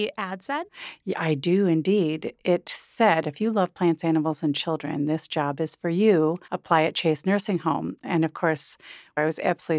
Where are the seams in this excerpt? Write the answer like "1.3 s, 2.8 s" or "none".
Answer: 6.4 s